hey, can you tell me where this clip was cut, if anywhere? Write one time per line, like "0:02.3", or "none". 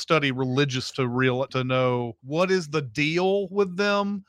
0:00.9
0:01.5
0:02.2